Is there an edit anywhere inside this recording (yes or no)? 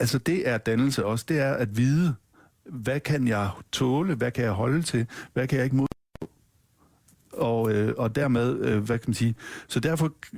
no